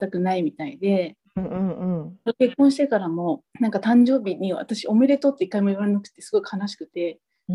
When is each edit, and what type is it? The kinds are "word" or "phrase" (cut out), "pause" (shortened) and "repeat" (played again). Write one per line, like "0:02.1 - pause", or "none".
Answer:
0:03.5 - pause